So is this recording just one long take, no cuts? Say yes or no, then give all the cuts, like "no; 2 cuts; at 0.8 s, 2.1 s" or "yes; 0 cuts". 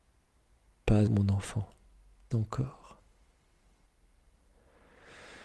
no; 2 cuts; at 1.1 s, 2.3 s